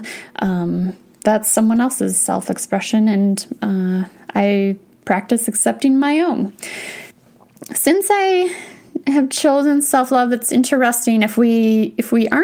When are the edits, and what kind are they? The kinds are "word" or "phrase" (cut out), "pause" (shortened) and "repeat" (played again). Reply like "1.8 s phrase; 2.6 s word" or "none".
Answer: none